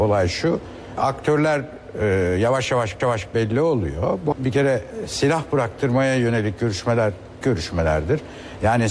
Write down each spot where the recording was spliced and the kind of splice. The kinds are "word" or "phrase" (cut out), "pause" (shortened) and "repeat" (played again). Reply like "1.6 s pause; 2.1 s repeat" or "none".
3.0 s repeat; 4.3 s phrase; 7.4 s word